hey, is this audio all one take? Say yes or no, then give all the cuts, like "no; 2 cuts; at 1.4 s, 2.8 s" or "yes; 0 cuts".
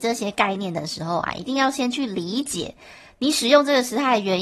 yes; 0 cuts